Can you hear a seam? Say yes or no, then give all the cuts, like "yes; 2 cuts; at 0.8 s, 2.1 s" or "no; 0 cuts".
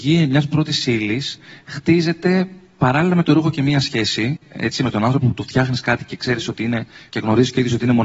no; 0 cuts